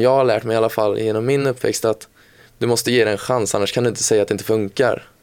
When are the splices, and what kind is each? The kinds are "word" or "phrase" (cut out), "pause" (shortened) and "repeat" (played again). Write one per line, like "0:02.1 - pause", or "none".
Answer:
none